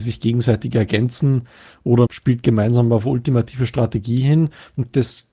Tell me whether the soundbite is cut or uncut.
cut